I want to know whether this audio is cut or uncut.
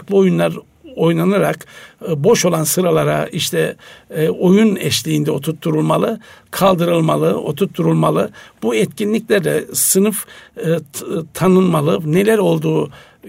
uncut